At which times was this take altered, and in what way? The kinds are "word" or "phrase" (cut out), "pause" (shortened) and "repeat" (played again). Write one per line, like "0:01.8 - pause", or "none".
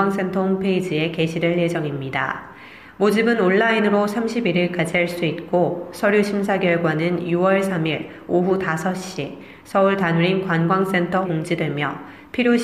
0:11.2 - word